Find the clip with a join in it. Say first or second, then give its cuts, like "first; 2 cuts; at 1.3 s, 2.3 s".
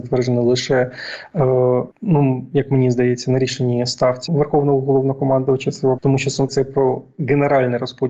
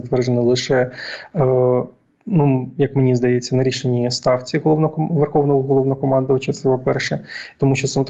first; 4 cuts; at 1.9 s, 4.3 s, 6.0 s, 6.5 s